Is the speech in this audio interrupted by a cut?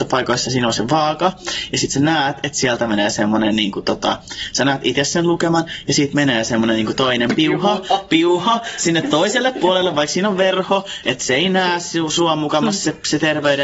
no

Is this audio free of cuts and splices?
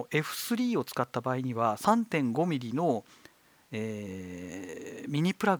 yes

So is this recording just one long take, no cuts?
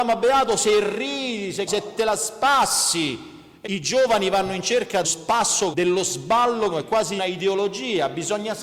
no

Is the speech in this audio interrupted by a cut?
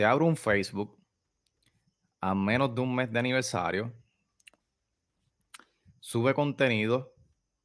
no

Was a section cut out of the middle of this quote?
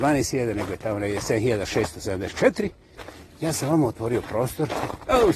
no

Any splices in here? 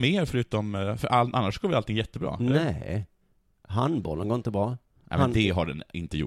no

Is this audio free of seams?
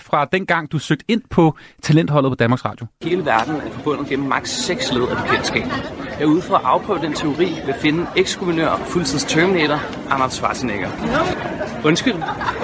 yes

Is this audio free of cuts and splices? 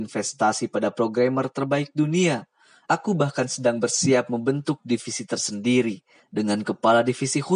yes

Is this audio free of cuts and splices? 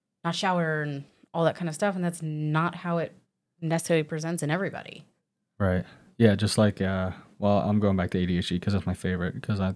yes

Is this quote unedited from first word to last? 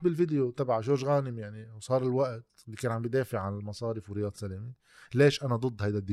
yes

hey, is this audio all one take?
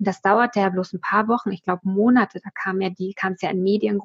yes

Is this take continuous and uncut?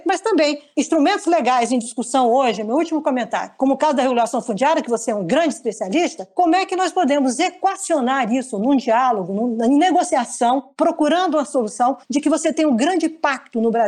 no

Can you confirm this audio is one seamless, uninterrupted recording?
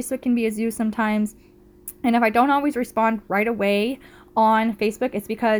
yes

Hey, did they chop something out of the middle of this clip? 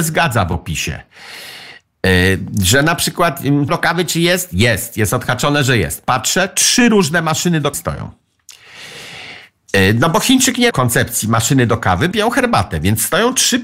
yes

